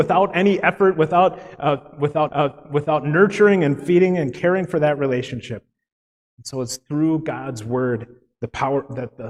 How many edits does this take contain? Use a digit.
1